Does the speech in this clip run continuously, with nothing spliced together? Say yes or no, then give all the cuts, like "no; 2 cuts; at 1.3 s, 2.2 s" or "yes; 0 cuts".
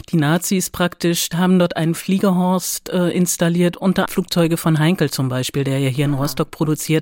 no; 2 cuts; at 1.3 s, 4.1 s